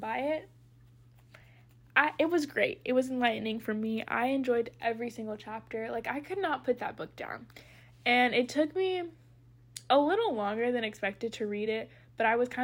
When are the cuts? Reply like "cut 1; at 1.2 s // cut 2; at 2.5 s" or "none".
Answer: none